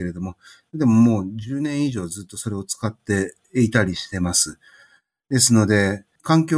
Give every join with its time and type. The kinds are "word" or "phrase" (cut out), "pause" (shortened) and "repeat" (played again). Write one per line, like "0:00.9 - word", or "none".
0:03.4 - pause

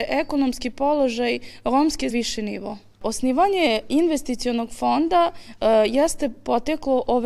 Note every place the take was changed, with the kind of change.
0:02.1 - phrase

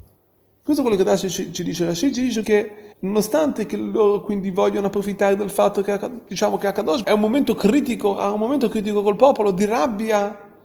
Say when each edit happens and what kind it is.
0:02.4 - word
0:02.9 - pause
0:07.0 - phrase

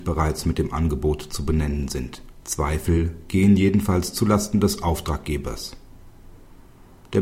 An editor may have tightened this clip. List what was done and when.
0:02.4 - pause

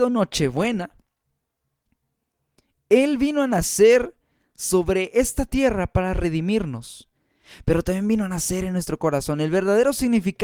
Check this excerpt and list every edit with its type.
none

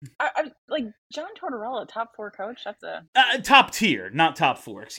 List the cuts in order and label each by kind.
0:03.1 - pause

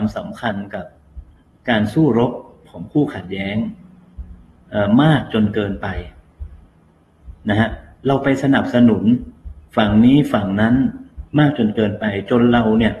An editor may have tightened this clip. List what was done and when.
0:01.5 - pause
0:11.3 - pause

